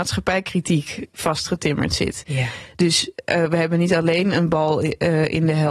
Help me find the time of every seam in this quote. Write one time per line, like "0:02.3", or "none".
none